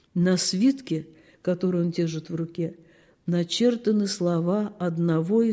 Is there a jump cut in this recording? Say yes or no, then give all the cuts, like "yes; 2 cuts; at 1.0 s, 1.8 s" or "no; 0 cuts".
no; 0 cuts